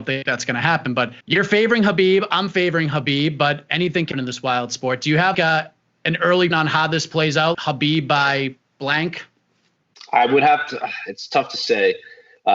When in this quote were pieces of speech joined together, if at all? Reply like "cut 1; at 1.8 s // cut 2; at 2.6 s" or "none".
cut 1; at 1.2 s // cut 2; at 4.1 s // cut 3; at 5.3 s // cut 4; at 6.5 s // cut 5; at 7.5 s